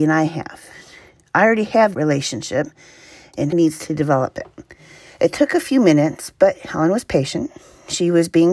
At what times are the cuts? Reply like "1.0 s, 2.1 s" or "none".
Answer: 1.9 s, 3.5 s